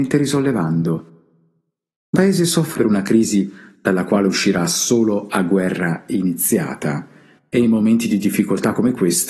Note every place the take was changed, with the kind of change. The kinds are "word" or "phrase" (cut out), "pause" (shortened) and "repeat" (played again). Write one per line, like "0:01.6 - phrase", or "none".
0:02.1 - word
0:02.7 - word